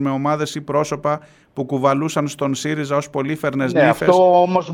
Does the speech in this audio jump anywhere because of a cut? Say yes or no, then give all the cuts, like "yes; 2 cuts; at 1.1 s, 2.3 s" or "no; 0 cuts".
no; 0 cuts